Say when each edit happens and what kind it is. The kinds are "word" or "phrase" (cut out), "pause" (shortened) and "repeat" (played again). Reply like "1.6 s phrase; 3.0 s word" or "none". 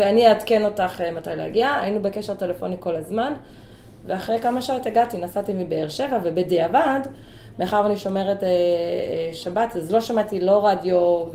none